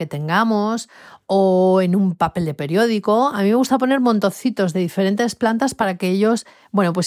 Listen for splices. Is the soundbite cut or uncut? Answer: uncut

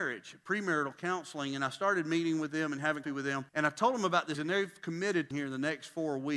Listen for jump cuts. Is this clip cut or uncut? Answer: cut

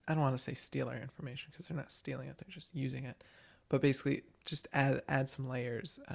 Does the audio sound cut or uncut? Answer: uncut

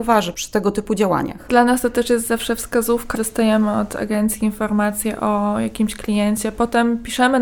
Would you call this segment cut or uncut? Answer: cut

